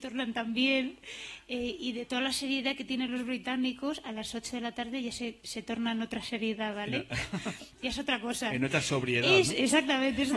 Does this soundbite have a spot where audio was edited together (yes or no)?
no